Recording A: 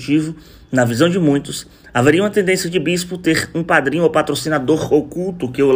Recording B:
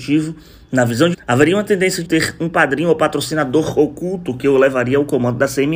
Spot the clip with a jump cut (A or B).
B